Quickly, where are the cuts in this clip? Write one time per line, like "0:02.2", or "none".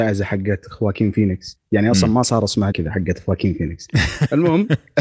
0:02.7